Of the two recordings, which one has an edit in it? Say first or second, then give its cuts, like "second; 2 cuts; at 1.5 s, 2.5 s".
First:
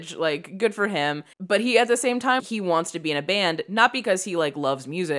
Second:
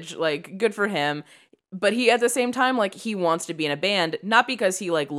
first; 2 cuts; at 1.3 s, 2.4 s